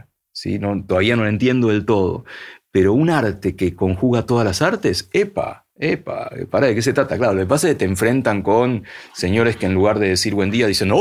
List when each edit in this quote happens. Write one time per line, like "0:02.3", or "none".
none